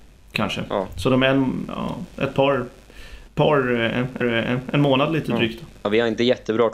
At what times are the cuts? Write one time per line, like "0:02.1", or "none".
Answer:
0:03.3
0:04.2